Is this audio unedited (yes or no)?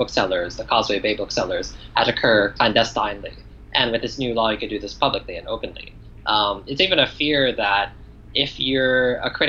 yes